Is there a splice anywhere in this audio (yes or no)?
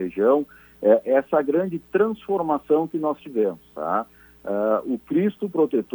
no